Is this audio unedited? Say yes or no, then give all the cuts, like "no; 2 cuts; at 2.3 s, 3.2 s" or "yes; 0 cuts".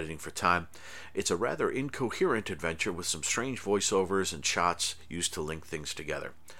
yes; 0 cuts